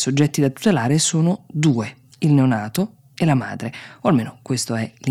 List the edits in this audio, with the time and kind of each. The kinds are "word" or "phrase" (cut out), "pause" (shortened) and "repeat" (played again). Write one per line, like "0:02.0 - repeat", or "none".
none